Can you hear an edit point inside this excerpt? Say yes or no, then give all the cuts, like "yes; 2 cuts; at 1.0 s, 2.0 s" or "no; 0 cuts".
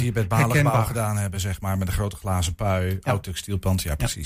no; 0 cuts